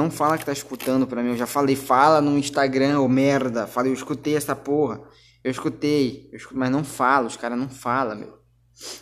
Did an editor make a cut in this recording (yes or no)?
no